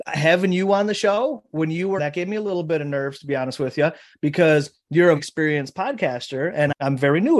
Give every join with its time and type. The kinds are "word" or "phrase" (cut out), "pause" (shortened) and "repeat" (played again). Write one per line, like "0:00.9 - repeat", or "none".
0:02.0 - word
0:05.2 - word

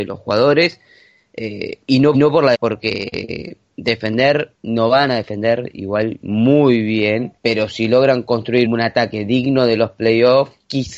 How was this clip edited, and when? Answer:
0:01.8 - pause
0:02.1 - repeat
0:02.5 - word
0:04.6 - pause
0:07.4 - pause
0:08.6 - word

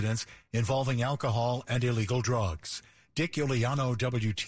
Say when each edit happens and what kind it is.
none

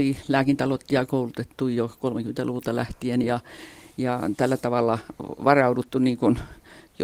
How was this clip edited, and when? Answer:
none

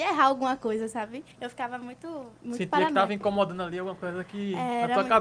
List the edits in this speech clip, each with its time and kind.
0:01.3 - pause
0:02.3 - pause

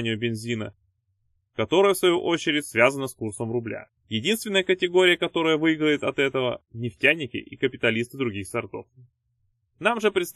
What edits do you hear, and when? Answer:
0:04.0 - pause

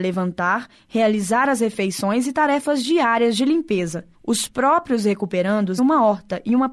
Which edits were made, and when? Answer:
0:04.1 - pause
0:05.8 - word

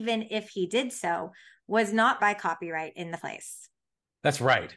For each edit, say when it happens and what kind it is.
0:02.2 - word
0:03.2 - word

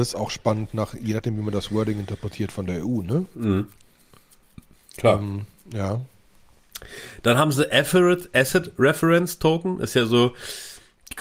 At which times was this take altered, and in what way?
none

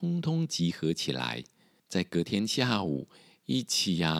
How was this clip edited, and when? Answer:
none

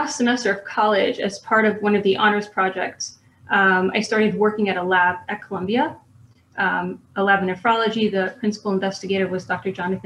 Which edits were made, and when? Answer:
none

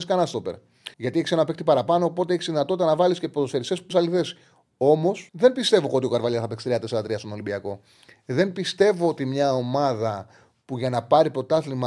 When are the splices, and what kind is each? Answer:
0:00.9 - pause
0:03.9 - phrase
0:05.3 - pause

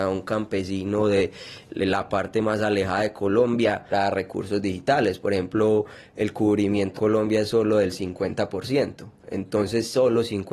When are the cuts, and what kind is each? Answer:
0:01.7 - word
0:03.9 - word
0:07.0 - phrase

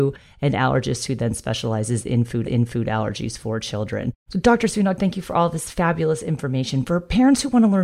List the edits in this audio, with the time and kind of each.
0:02.4 - repeat

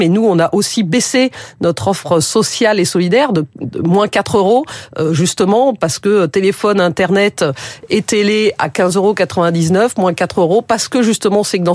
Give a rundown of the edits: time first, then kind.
none

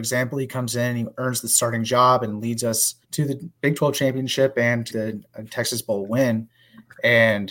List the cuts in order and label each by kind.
0:03.0 - pause
0:03.6 - pause
0:04.9 - word

